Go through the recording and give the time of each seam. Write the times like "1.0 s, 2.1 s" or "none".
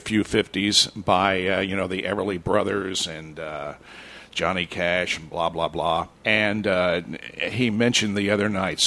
6.1 s